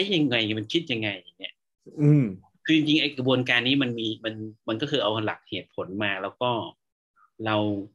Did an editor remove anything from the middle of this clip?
no; 0 cuts

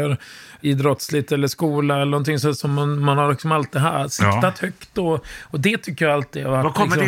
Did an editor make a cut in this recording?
no; 0 cuts

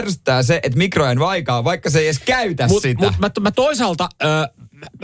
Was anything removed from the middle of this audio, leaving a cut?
no; 0 cuts

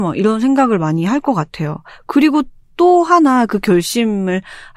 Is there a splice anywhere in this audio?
no; 0 cuts

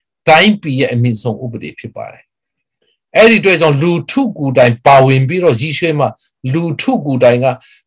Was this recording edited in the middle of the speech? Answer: no; 0 cuts

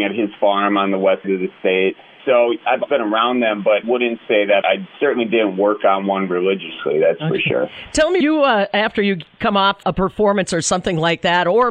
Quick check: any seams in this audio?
yes; 7 cuts; at 1.2 s, 2.2 s, 2.9 s, 3.8 s, 4.6 s, 8.2 s, 9.8 s

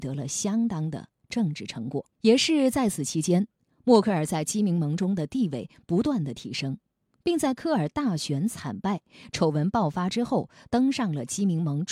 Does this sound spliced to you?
yes; 1 cut; at 2.1 s

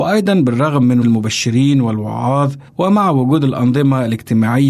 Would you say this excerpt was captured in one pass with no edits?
no; 2 cuts; at 1.0 s, 2.7 s

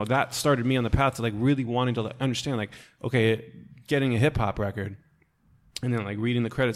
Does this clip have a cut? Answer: no; 0 cuts

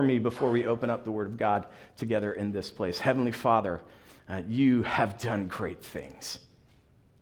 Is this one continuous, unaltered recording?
yes; 0 cuts

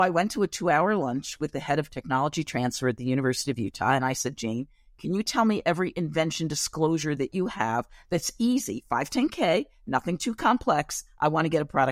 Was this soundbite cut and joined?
no; 0 cuts

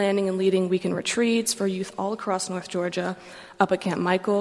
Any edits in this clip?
no; 0 cuts

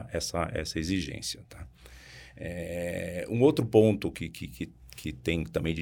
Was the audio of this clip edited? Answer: no; 0 cuts

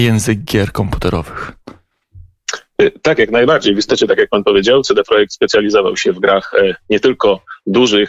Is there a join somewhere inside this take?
no; 0 cuts

